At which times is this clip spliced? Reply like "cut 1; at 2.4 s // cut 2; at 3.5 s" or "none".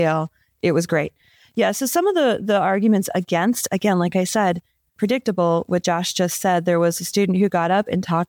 none